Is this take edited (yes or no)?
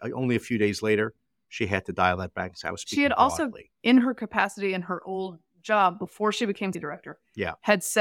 yes